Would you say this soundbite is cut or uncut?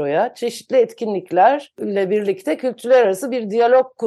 uncut